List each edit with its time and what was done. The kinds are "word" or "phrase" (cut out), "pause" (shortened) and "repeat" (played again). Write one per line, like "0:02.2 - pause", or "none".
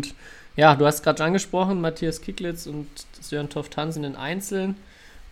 0:04.0 - phrase